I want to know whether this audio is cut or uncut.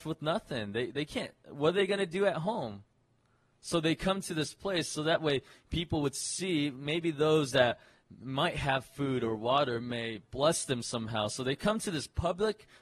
uncut